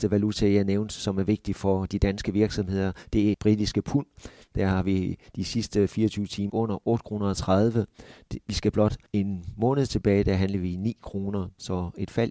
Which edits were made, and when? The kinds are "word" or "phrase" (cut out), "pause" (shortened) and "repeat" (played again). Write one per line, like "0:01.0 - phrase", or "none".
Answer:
0:03.3 - word
0:06.5 - word
0:09.1 - pause